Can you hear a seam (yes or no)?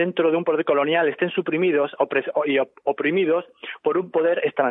no